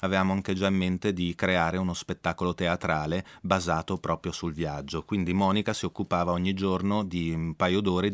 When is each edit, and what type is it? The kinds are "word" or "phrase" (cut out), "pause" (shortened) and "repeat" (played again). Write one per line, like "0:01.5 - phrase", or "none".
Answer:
none